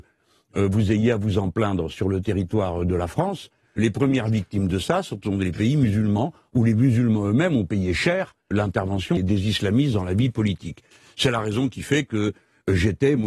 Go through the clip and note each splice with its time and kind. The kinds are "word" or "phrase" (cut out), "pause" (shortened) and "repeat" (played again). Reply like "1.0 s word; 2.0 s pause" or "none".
3.8 s word; 8.5 s word; 9.2 s word